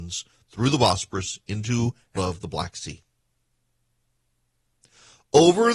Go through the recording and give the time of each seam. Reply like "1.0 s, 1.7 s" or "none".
2.2 s